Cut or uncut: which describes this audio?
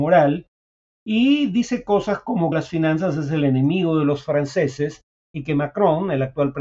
cut